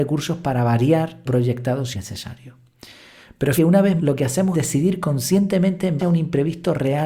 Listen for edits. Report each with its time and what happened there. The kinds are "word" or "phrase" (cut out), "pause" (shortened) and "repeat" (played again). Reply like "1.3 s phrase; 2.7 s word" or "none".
1.3 s word; 1.9 s word; 3.6 s word; 4.0 s word; 4.5 s word; 6.0 s word